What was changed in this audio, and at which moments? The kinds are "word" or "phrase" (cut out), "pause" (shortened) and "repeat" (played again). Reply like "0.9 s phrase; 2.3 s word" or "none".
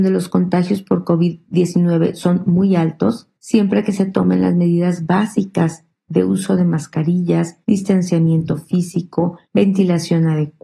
3.4 s pause; 7.6 s pause; 9.4 s pause